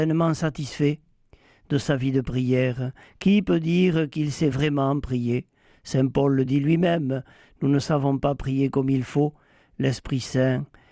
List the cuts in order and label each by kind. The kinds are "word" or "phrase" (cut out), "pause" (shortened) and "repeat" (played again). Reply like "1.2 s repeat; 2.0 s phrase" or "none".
none